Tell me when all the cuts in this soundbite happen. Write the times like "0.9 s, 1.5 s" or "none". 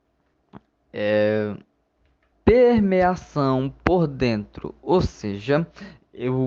2.3 s